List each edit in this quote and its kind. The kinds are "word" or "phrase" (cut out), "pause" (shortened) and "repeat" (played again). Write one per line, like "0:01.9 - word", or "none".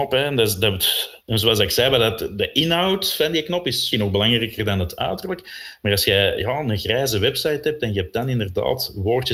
0:01.2 - pause
0:03.9 - word

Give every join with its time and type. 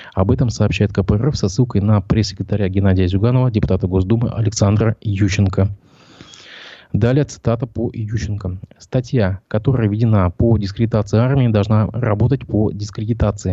none

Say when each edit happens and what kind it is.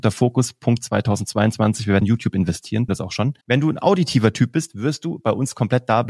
0:02.0 - word
0:02.9 - word
0:03.4 - pause

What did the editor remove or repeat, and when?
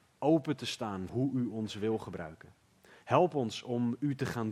0:01.1 - word

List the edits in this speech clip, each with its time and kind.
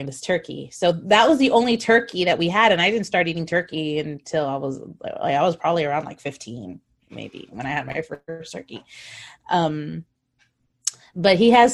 none

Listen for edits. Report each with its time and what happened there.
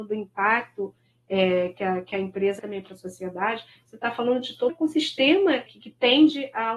0:02.6 - word
0:04.7 - word
0:05.7 - word

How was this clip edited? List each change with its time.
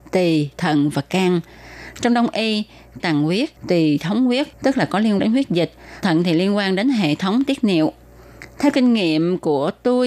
0:03.0 - word
0:03.6 - pause
0:04.5 - pause
0:05.2 - word
0:06.0 - word

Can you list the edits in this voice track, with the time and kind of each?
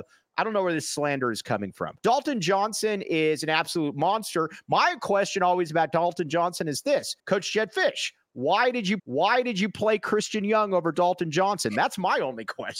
0:02.0 - pause
0:07.2 - pause
0:09.0 - repeat

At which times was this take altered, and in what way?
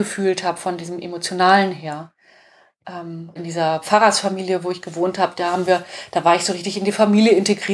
0:03.4 - word

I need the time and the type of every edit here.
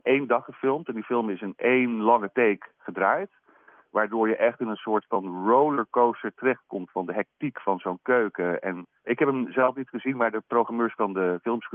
0:09.0 - word

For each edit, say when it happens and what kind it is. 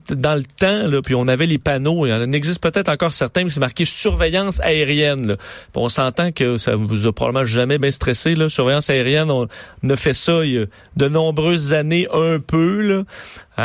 0:07.8 - word

